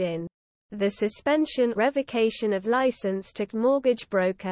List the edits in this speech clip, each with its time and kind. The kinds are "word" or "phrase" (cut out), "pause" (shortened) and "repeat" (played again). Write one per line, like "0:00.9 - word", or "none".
0:01.8 - word
0:02.6 - word
0:03.5 - word